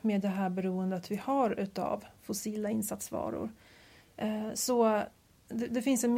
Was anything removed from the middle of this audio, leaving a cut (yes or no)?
no